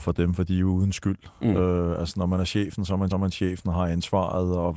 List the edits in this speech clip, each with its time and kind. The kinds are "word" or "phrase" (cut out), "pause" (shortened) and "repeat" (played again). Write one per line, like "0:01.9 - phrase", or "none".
0:03.1 - repeat